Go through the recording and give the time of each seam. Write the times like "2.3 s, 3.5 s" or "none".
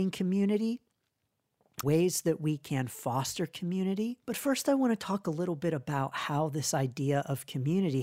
1.8 s, 4.2 s